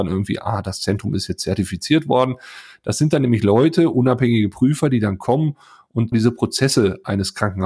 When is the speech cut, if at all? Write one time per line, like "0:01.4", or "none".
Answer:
0:06.1